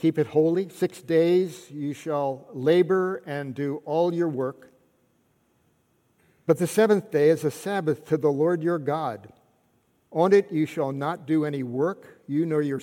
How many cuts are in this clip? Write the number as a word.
zero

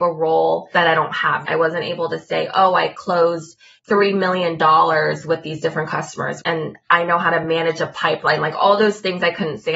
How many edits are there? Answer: zero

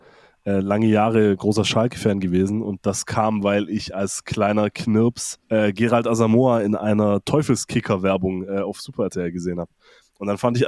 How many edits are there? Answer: one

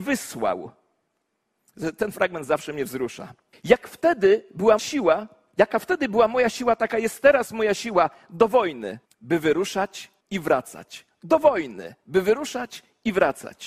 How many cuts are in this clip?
four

